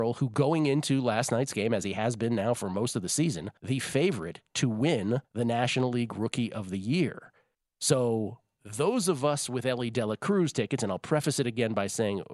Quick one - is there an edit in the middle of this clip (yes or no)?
yes